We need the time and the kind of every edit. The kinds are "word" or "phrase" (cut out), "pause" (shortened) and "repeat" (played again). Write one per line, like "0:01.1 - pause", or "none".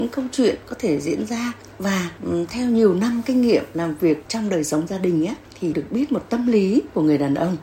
0:05.7 - word